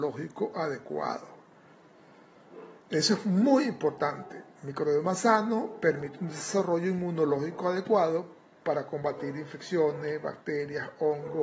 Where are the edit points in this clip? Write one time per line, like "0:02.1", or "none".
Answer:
0:02.8